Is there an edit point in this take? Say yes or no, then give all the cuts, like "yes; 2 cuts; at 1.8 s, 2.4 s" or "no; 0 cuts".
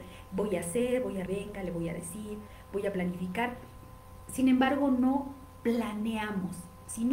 yes; 1 cut; at 1.3 s